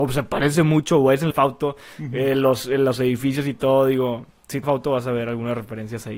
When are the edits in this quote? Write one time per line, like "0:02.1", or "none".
0:01.3
0:04.6